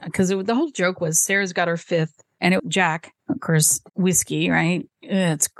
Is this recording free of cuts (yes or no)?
no